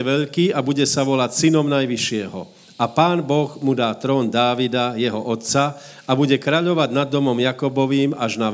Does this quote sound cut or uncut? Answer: uncut